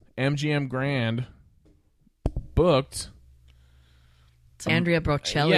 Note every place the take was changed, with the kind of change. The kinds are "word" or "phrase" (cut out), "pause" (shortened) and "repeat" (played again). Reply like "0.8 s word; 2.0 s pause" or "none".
4.7 s word